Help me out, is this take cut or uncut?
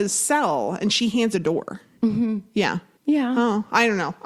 cut